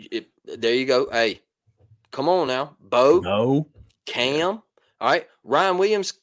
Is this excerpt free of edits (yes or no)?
yes